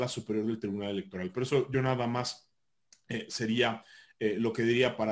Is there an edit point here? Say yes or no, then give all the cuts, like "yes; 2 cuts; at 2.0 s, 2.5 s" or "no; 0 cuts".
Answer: no; 0 cuts